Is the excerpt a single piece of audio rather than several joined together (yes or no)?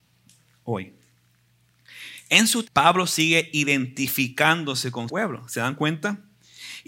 no